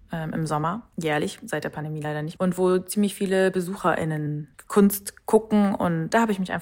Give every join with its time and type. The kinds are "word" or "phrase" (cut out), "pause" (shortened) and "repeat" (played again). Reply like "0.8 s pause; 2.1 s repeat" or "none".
0.9 s pause; 2.4 s word